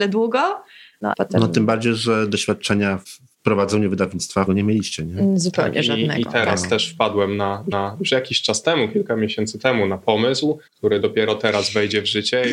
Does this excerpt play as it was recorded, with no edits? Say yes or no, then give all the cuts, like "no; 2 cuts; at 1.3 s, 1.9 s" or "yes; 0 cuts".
no; 4 cuts; at 1.1 s, 4.5 s, 7.7 s, 10.7 s